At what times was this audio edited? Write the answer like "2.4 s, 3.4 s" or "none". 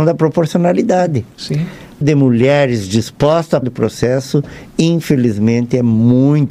2.0 s, 3.6 s